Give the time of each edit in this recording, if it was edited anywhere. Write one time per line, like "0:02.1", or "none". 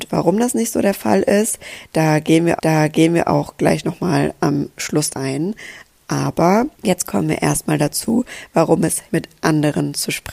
0:02.6
0:05.1
0:06.7
0:09.1